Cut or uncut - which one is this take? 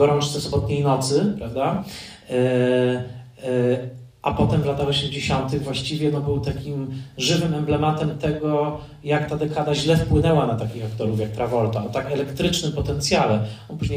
uncut